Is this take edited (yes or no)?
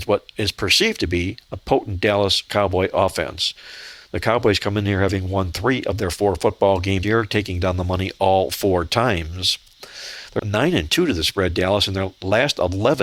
yes